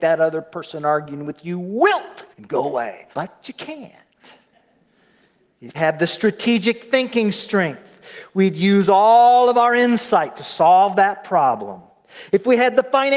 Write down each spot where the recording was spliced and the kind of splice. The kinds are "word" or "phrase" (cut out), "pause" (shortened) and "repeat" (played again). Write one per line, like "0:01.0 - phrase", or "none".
0:02.3 - pause
0:03.1 - pause
0:05.7 - word